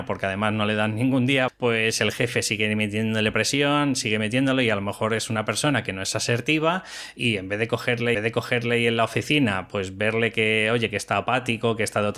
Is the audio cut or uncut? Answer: cut